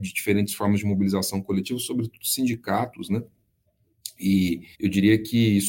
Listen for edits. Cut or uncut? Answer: cut